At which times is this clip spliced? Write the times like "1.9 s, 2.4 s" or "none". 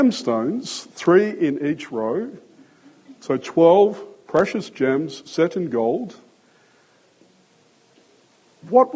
none